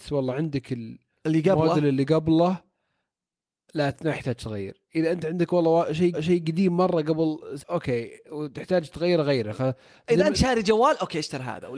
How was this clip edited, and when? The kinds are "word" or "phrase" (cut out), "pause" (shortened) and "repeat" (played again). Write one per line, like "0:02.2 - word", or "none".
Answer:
0:06.1 - repeat
0:07.6 - phrase
0:10.3 - word